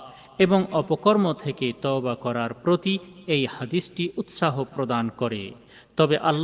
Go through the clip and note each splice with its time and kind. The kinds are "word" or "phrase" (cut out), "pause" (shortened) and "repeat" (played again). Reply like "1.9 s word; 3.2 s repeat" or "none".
none

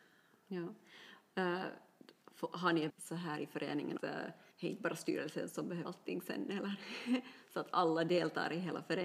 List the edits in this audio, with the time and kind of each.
2.9 s word; 4.0 s phrase; 4.5 s pause; 5.8 s word

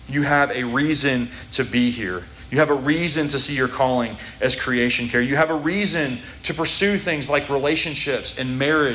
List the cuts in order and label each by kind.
none

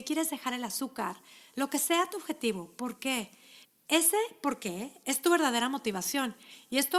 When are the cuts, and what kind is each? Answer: 3.6 s pause

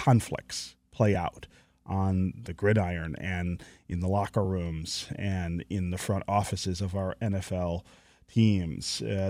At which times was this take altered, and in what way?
none

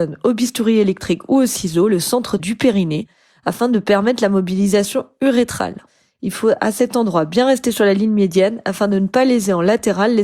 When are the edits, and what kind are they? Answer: 2.4 s word

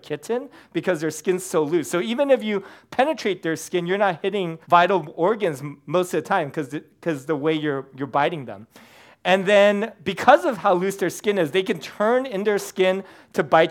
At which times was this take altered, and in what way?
4.6 s pause

